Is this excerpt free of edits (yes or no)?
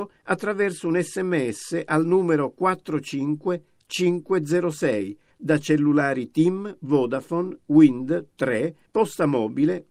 yes